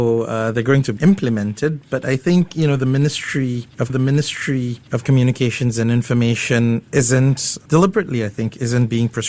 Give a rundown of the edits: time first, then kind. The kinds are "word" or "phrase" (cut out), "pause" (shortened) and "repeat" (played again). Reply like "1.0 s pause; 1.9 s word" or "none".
3.9 s repeat